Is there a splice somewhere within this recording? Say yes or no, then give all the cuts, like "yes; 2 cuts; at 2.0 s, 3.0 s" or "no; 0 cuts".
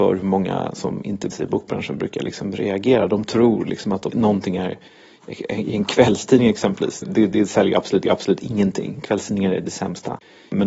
yes; 4 cuts; at 1.3 s, 4.1 s, 7.0 s, 8.0 s